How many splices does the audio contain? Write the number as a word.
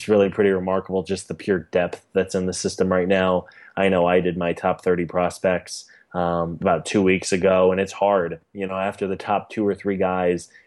zero